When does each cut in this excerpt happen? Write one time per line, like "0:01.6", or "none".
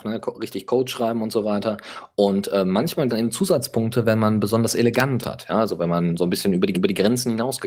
0:03.1
0:05.2
0:06.7